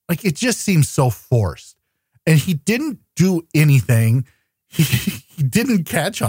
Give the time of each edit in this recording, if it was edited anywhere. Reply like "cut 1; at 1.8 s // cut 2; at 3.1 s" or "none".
none

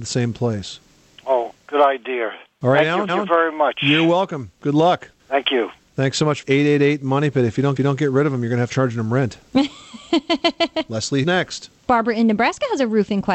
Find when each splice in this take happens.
cut 1; at 2.5 s // cut 2; at 3.1 s // cut 3; at 5.2 s // cut 4; at 6.4 s // cut 5; at 7.8 s // cut 6; at 8.7 s // cut 7; at 11.2 s // cut 8; at 11.8 s

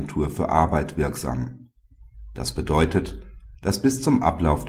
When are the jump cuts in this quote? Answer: none

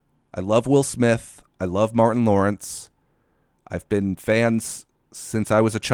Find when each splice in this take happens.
none

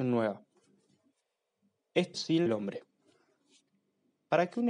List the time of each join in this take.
cut 1; at 2.1 s // cut 2; at 2.5 s

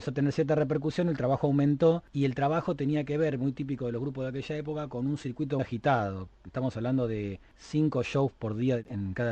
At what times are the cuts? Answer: cut 1; at 5.6 s

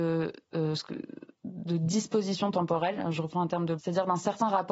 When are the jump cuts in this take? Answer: cut 1; at 1.3 s // cut 2; at 3.8 s

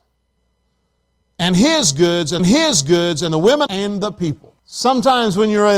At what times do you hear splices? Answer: cut 1; at 2.4 s // cut 2; at 3.7 s // cut 3; at 4.6 s

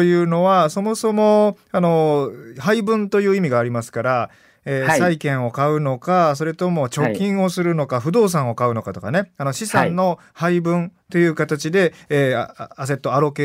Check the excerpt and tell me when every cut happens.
none

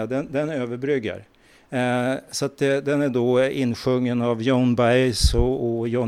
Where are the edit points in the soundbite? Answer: none

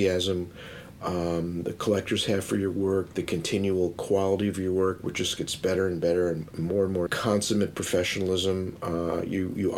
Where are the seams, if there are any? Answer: cut 1; at 7.1 s

